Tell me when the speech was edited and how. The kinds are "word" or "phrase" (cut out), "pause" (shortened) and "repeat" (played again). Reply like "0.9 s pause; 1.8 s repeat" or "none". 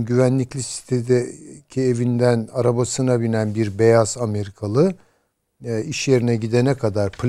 none